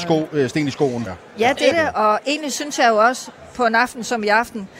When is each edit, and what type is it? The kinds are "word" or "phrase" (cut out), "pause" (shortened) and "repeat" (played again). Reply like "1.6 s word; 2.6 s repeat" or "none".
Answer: 1.1 s word; 1.7 s word